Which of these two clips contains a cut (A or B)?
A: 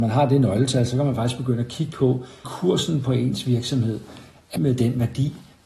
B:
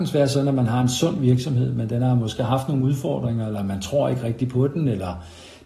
A